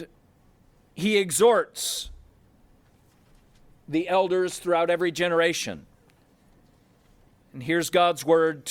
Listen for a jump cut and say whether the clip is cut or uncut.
uncut